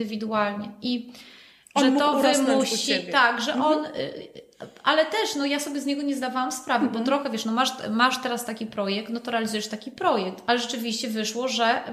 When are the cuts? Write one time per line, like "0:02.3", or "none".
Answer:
none